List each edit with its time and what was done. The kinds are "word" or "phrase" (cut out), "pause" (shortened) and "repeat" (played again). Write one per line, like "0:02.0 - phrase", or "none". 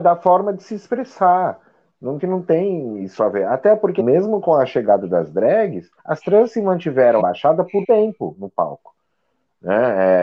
0:02.2 - phrase
0:03.2 - word
0:04.0 - word
0:06.0 - pause
0:07.2 - phrase
0:07.8 - word